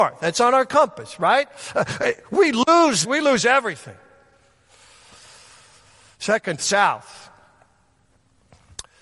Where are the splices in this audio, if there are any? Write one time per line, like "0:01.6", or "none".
0:03.0
0:06.6